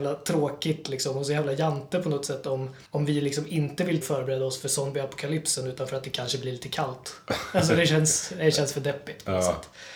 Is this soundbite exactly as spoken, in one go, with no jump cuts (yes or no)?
no